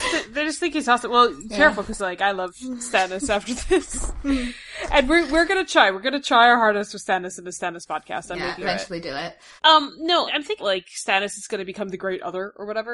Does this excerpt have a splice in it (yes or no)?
yes